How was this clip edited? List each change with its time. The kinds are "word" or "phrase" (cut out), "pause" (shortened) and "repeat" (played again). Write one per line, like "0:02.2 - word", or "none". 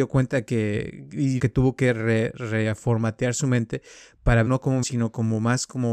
0:01.4 - word
0:04.5 - word
0:04.8 - word